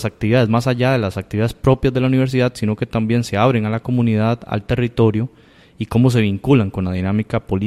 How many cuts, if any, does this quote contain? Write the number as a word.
zero